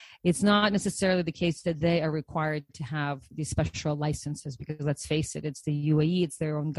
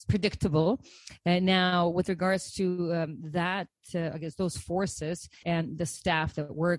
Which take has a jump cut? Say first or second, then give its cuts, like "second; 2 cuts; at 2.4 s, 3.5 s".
second; 1 cut; at 5.4 s